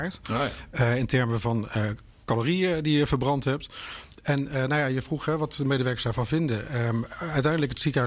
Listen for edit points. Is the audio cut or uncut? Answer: uncut